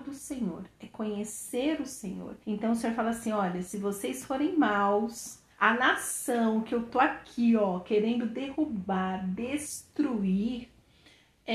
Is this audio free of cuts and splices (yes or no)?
no